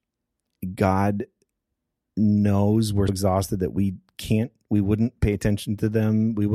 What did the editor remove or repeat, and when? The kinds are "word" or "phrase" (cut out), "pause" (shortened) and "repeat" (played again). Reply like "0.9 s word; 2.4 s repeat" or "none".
3.1 s word